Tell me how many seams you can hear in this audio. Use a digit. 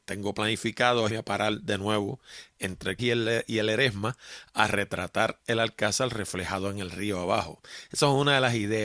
2